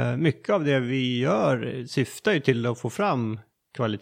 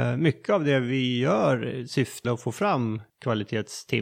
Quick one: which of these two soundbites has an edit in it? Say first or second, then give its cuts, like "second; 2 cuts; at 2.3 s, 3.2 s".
second; 2 cuts; at 2.2 s, 3.1 s